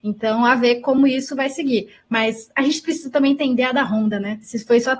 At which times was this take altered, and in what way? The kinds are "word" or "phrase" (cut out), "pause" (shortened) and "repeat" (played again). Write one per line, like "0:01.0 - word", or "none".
none

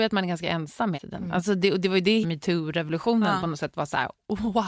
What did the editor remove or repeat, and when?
0:00.9 - word
0:02.2 - phrase

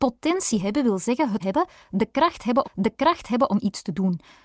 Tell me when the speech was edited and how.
0:01.4 - word
0:02.6 - repeat

